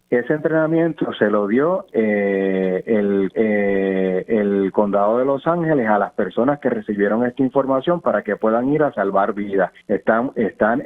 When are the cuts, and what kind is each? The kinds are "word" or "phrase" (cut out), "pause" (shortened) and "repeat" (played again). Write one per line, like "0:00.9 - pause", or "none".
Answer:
0:03.3 - repeat
0:09.8 - pause